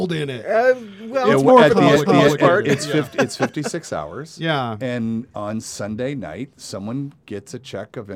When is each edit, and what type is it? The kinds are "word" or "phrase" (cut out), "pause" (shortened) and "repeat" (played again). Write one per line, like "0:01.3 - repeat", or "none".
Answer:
0:02.1 - repeat